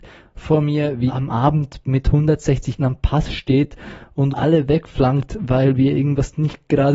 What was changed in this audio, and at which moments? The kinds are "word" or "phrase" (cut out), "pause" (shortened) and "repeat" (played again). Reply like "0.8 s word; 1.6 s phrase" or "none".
1.1 s word; 2.8 s word; 4.3 s word